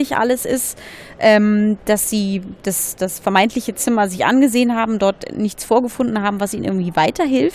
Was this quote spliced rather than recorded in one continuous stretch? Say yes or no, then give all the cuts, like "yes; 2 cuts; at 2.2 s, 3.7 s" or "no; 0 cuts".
no; 0 cuts